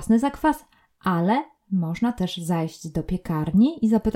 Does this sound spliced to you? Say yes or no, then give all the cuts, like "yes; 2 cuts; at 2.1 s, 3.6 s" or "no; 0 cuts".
no; 0 cuts